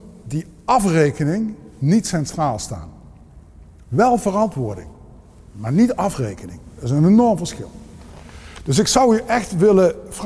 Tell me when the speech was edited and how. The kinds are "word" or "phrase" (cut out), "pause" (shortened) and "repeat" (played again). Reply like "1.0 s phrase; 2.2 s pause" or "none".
none